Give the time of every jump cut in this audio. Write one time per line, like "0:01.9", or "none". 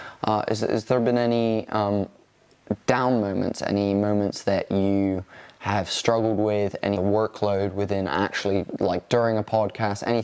0:07.0